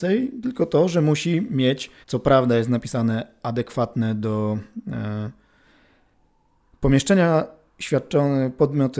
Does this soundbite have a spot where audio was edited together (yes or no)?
yes